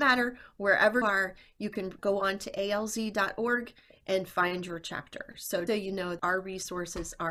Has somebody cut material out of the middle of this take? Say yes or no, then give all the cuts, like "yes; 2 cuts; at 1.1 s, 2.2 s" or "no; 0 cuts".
yes; 4 cuts; at 1.0 s, 2.0 s, 5.7 s, 6.2 s